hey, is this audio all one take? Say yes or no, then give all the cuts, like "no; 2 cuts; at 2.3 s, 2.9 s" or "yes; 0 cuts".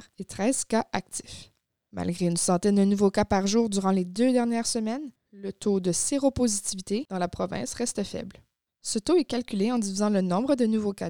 yes; 0 cuts